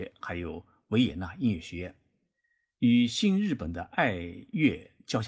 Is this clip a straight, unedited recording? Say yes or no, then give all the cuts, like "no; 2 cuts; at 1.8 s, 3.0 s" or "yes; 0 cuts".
yes; 0 cuts